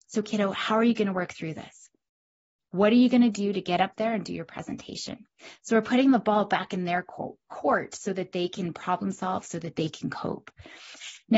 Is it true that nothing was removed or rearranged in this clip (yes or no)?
no